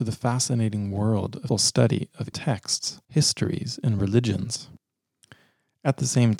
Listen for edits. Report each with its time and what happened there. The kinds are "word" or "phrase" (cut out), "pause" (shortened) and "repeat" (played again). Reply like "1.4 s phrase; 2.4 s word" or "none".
1.5 s phrase; 2.3 s word; 3.0 s pause